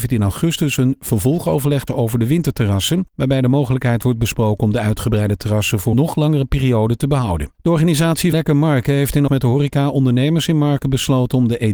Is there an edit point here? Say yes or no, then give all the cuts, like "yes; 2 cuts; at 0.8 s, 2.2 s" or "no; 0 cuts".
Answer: yes; 6 cuts; at 1.9 s, 3.1 s, 5.9 s, 7.5 s, 8.3 s, 9.3 s